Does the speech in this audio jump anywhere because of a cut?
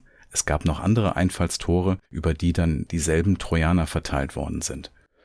yes; 1 cut; at 2.1 s

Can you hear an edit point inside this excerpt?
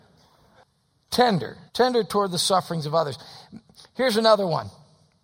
yes; 1 cut; at 1.7 s

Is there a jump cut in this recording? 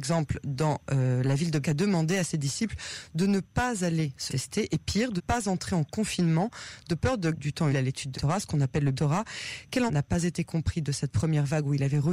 yes; 8 cuts; at 1.6 s, 4.3 s, 5.2 s, 7.3 s, 7.7 s, 8.1 s, 8.9 s, 9.9 s

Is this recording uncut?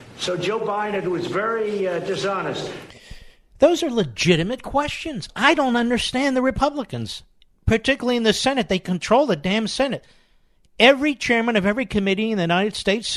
yes; 0 cuts

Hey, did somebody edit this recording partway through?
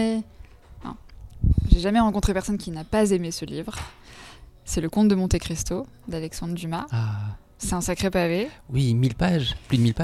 no; 0 cuts

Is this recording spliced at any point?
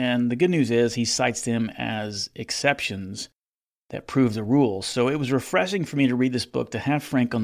no; 0 cuts

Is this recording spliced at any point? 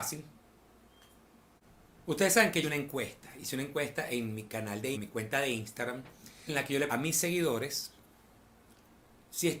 yes; 4 cuts; at 2.6 s, 4.9 s, 6.5 s, 6.9 s

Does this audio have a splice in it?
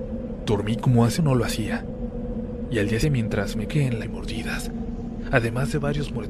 yes; 4 cuts; at 1.2 s, 3.0 s, 3.7 s, 4.0 s

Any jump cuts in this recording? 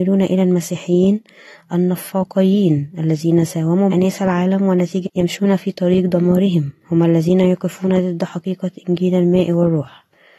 yes; 2 cuts; at 3.9 s, 5.1 s

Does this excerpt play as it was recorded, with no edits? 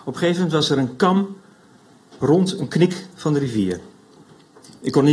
yes; 0 cuts

